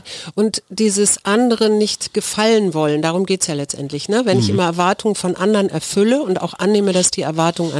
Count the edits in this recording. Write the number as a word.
zero